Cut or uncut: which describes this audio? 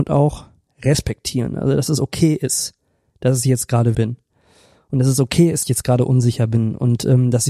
cut